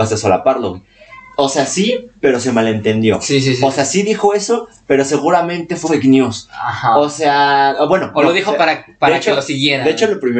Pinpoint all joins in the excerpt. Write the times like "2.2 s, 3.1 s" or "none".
5.8 s